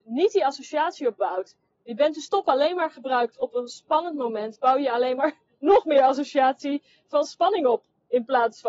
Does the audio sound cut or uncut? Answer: uncut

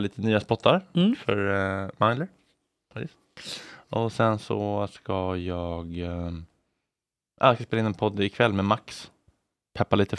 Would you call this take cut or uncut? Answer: uncut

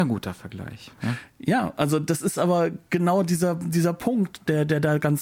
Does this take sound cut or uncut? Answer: uncut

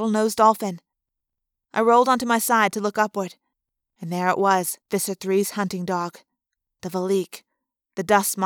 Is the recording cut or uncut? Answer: cut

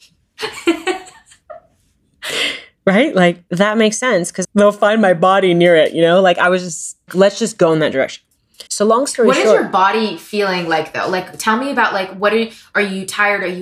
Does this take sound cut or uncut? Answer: cut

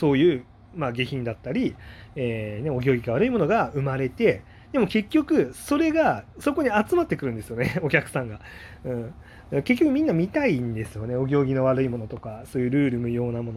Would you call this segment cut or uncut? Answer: cut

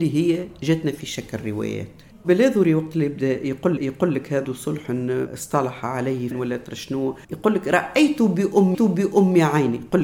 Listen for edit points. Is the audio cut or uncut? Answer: cut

